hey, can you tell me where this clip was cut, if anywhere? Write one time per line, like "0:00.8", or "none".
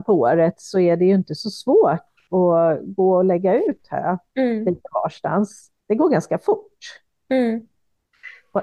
0:05.8